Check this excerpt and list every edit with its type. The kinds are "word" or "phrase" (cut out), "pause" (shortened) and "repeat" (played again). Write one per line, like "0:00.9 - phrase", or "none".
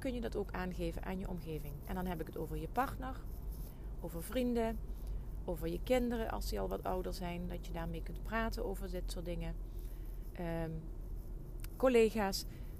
none